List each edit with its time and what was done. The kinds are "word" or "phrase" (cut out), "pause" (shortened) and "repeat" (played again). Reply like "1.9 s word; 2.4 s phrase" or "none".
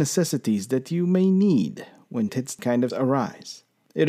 2.3 s word; 2.6 s word; 2.9 s word